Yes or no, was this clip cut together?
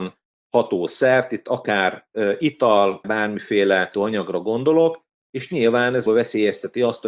yes